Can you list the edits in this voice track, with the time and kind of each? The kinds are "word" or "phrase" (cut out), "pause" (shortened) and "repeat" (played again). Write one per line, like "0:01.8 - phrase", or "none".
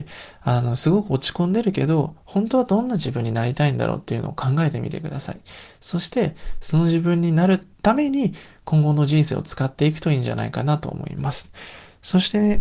0:07.7 - pause